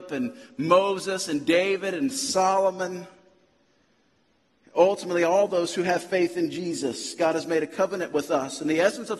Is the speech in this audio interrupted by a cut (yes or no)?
no